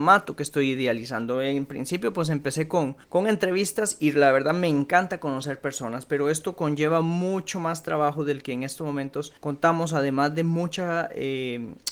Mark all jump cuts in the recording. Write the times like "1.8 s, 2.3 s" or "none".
3.0 s, 9.4 s